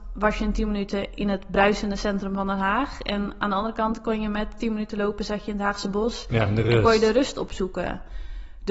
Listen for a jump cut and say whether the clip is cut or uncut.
uncut